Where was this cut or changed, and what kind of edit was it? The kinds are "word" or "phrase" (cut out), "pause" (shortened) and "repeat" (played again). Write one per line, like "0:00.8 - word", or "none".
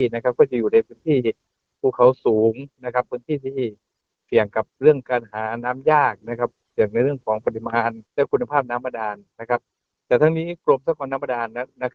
0:08.1 - pause

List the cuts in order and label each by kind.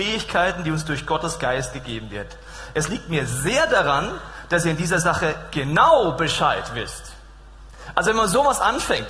none

